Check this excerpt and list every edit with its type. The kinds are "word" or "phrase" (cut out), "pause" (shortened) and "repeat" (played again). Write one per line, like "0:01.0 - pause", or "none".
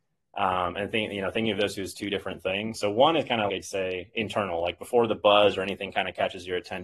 0:02.7 - word
0:03.5 - word

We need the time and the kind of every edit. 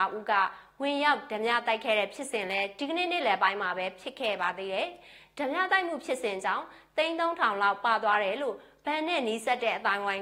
none

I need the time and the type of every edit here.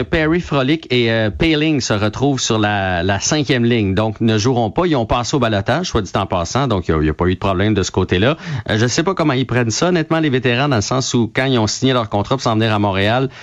none

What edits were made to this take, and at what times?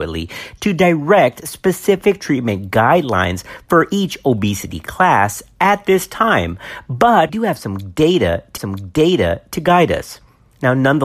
0:07.3 - word
0:08.6 - repeat

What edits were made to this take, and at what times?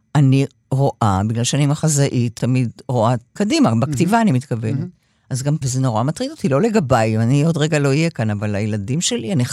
0:02.4 - word
0:03.4 - word
0:05.6 - phrase

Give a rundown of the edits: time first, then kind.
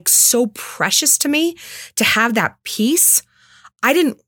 none

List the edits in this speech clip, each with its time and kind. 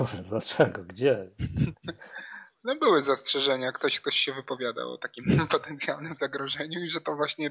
none

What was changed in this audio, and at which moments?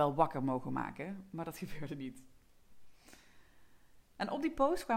0:04.0 - pause

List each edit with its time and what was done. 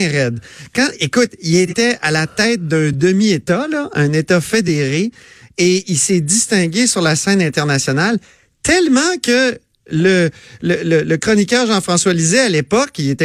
none

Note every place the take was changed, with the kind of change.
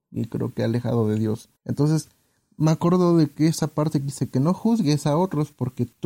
0:01.6 - pause

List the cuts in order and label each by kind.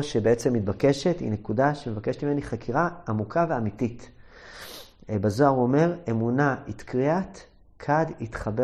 none

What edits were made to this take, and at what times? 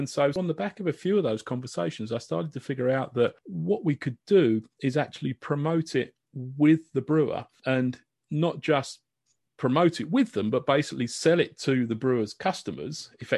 none

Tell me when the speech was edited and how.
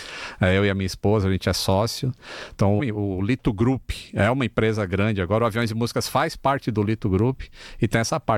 0:02.8 - phrase

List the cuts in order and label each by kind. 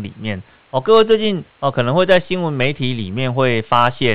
0:01.5 - pause

